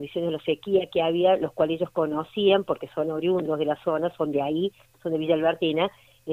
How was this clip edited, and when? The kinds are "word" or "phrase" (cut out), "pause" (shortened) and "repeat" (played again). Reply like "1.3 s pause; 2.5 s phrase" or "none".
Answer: none

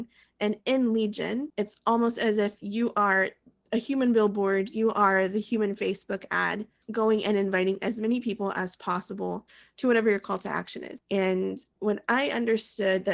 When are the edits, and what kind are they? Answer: none

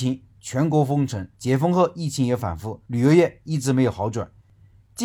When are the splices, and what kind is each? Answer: 1.3 s pause; 2.9 s pause

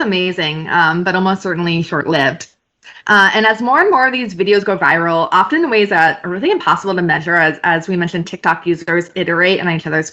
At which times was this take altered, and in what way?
3.0 s pause

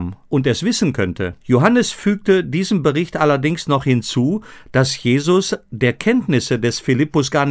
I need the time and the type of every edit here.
1.4 s pause

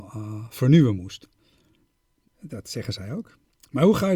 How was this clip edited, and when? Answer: none

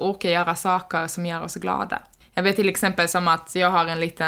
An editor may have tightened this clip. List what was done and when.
2.2 s pause

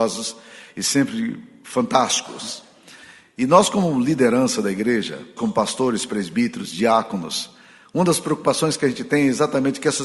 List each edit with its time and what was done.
5.4 s word

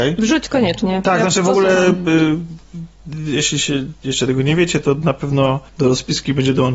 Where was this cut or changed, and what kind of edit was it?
5.7 s pause

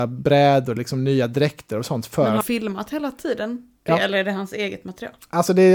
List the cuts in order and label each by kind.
2.4 s word; 3.8 s pause

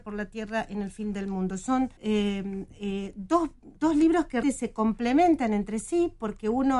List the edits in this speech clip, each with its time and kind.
2.0 s pause; 3.8 s pause; 4.4 s word

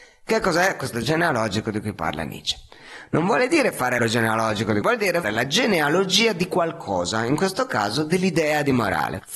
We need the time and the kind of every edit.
0.9 s word; 4.0 s word; 4.8 s word; 5.2 s word

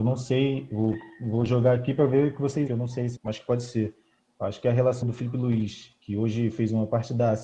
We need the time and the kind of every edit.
2.7 s phrase; 3.2 s phrase; 5.0 s word

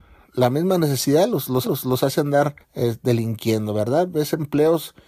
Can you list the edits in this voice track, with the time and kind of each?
1.6 s repeat; 2.6 s pause

